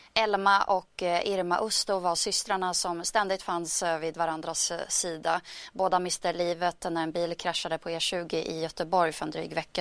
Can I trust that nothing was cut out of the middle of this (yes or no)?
yes